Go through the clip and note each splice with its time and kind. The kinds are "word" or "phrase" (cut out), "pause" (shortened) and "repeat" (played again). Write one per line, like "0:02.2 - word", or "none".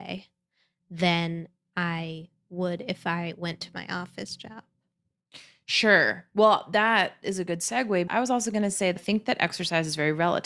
0:08.1 - word
0:09.0 - word